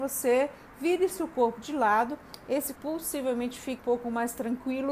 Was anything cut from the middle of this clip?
yes; 2 cuts; at 2.8 s, 3.8 s

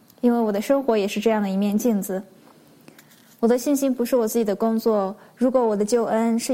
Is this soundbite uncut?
yes; 0 cuts

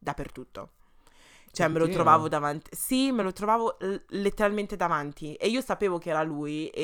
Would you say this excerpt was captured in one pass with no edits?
yes; 0 cuts

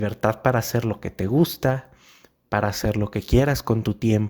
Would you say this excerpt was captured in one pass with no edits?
yes; 0 cuts

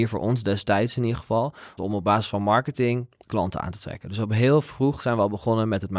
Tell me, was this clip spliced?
yes; 1 cut; at 1.8 s

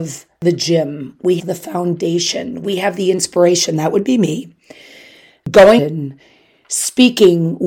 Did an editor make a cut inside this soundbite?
yes; 2 cuts; at 1.4 s, 5.8 s

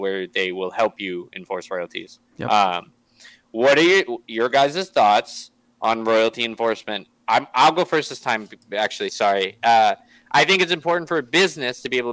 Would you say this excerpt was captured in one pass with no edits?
yes; 0 cuts

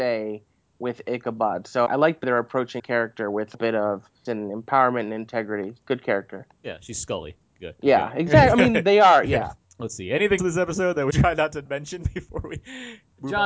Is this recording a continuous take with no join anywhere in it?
no; 8 cuts; at 1.9 s, 2.2 s, 2.8 s, 3.5 s, 4.3 s, 10.4 s, 11.1 s, 11.7 s

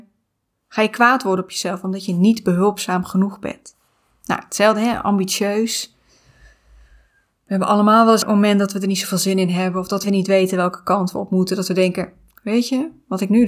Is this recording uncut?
no; 2 cuts; at 8.2 s, 10.0 s

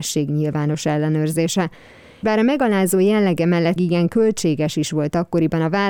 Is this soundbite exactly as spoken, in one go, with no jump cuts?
no; 2 cuts; at 2.2 s, 3.8 s

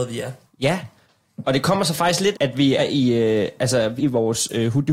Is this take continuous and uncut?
no; 3 cuts; at 2.3 s, 2.8 s, 4.0 s

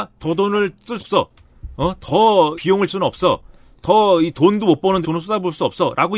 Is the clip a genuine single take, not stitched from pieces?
no; 4 cuts; at 1.0 s, 2.6 s, 2.9 s, 5.0 s

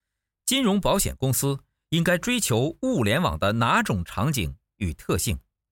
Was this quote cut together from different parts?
no; 0 cuts

